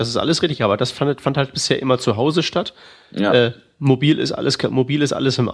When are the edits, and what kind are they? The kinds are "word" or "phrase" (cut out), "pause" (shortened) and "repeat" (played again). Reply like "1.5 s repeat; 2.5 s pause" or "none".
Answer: none